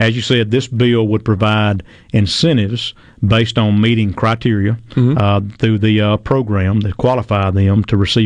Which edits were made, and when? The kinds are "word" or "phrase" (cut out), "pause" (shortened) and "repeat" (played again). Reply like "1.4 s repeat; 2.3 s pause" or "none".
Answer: none